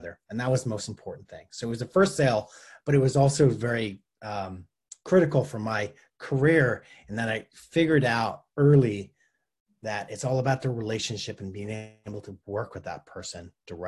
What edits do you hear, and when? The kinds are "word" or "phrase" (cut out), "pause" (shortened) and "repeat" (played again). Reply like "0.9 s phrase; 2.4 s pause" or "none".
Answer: none